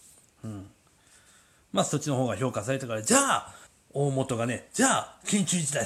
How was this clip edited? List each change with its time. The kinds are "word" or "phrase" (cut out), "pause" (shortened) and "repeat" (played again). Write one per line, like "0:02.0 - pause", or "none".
0:03.7 - pause